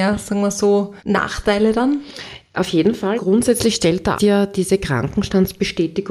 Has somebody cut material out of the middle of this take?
yes; 3 cuts; at 1.0 s, 3.2 s, 4.2 s

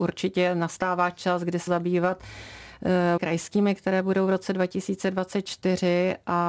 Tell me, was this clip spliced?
yes; 2 cuts; at 1.7 s, 3.2 s

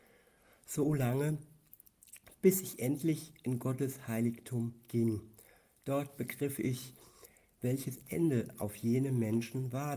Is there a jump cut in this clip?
no; 0 cuts

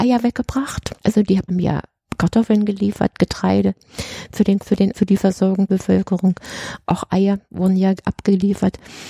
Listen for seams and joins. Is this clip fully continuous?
no; 5 cuts; at 1.0 s, 1.5 s, 4.6 s, 4.9 s, 5.7 s

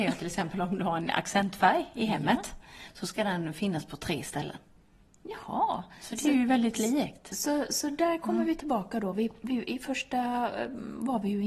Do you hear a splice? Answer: no; 0 cuts

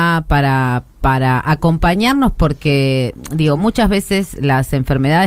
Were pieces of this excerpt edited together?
no; 0 cuts

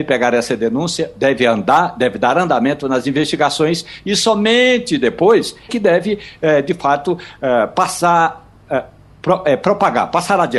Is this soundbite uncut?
no; 1 cut; at 5.7 s

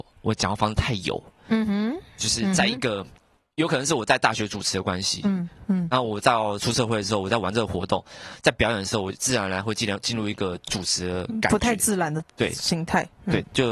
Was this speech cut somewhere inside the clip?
no; 0 cuts

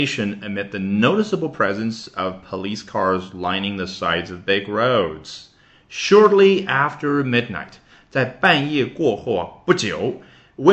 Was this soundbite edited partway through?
no; 0 cuts

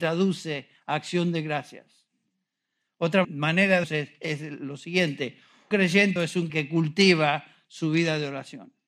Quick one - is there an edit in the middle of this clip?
yes; 5 cuts; at 3.2 s, 3.8 s, 5.7 s, 6.2 s, 6.5 s

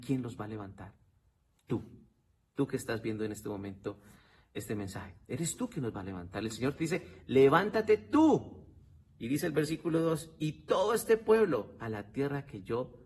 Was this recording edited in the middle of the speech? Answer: no; 0 cuts

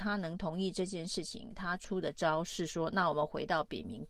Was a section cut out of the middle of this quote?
no; 0 cuts

